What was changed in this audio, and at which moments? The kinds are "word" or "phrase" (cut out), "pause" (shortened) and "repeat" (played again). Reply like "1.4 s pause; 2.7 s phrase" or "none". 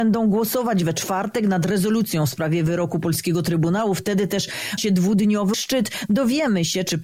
4.8 s word; 5.5 s word